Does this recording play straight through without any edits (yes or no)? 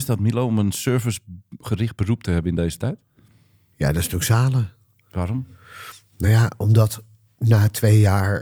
yes